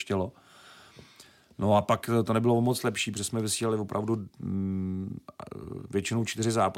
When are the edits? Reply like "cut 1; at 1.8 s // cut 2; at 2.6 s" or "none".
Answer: none